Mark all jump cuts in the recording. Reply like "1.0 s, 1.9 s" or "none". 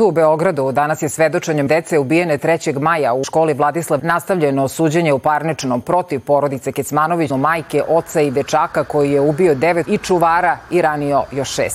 1.7 s, 3.2 s, 4.0 s, 5.8 s, 7.3 s, 9.8 s

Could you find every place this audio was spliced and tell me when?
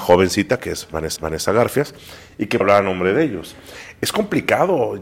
1.2 s, 2.6 s

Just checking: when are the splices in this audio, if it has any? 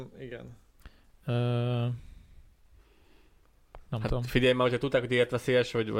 none

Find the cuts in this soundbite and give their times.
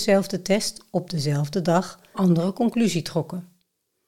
2.1 s

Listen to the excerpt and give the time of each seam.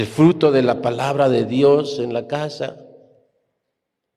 none

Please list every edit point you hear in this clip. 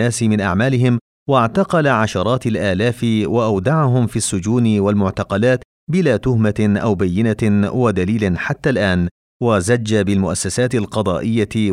none

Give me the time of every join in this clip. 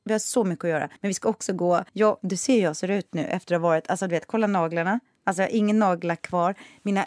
1.0 s, 1.9 s

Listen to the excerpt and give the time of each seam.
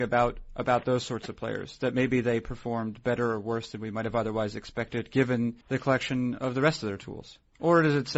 5.6 s

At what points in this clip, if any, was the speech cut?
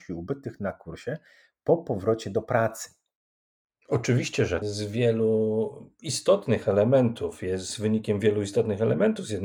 4.6 s

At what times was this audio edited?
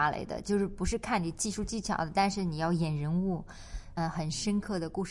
4.0 s

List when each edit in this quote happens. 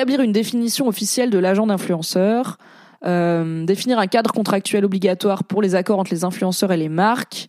none

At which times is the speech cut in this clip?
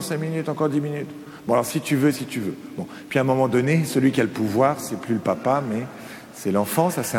none

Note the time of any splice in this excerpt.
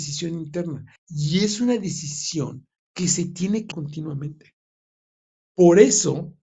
1.0 s, 2.8 s, 3.7 s

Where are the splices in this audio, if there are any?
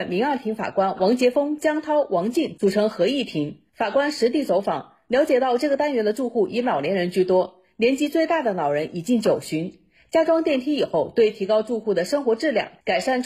none

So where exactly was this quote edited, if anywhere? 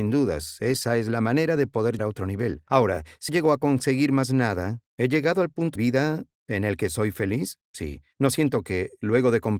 2.0 s, 3.3 s, 4.9 s, 5.8 s

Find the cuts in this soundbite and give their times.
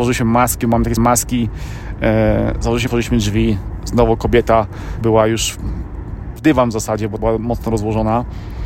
1.0 s, 2.9 s, 5.0 s, 6.4 s, 7.2 s

